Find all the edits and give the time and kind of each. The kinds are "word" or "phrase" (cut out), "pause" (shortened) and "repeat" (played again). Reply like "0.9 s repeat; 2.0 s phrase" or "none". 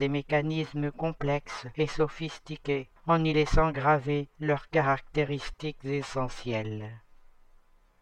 3.0 s pause